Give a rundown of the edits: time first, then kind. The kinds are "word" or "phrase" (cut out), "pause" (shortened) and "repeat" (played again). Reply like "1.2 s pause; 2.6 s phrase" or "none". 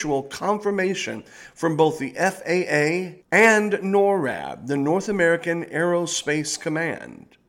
3.2 s pause